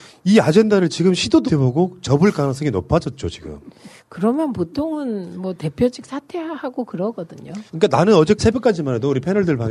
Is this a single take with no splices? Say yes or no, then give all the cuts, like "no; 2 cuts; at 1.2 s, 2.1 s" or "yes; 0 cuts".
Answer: no; 3 cuts; at 1.5 s, 7.7 s, 8.4 s